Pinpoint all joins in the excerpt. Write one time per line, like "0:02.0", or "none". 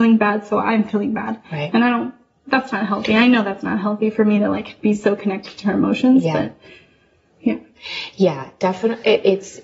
none